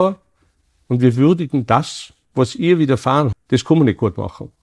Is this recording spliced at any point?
yes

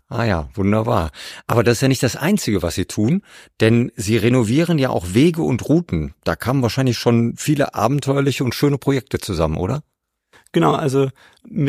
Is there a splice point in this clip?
no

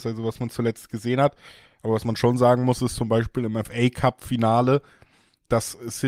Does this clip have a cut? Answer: no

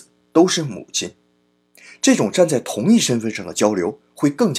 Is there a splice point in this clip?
no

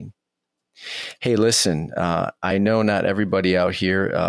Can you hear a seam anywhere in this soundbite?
no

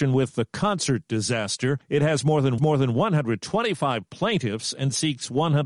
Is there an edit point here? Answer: yes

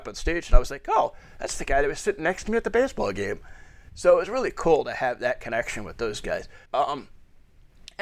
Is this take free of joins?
no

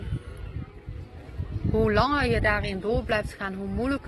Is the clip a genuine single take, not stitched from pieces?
yes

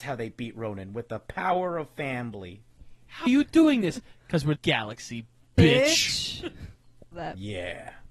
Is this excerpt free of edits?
no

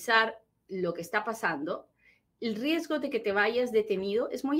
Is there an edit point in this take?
no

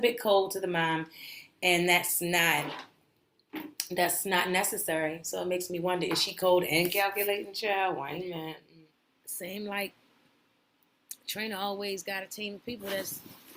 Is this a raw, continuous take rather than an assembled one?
no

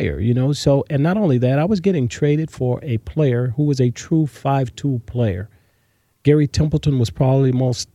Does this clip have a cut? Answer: no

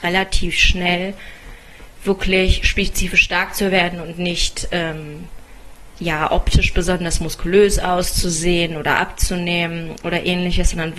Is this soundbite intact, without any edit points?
yes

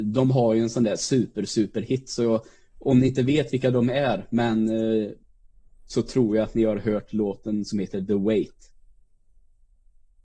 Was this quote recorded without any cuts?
yes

